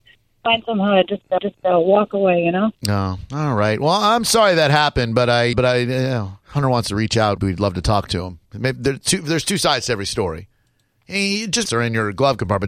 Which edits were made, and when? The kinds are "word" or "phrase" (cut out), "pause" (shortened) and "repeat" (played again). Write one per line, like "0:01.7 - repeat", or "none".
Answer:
0:01.4 - repeat
0:02.8 - pause
0:05.5 - word
0:06.4 - pause
0:07.4 - word
0:08.5 - pause
0:11.7 - phrase